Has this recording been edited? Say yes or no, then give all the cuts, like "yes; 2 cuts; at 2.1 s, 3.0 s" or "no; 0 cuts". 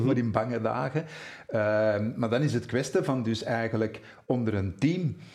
no; 0 cuts